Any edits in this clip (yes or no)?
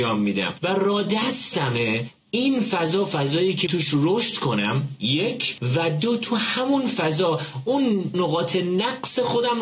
yes